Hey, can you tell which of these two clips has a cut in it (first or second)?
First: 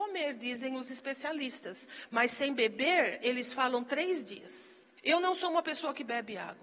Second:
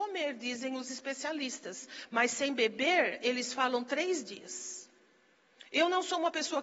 first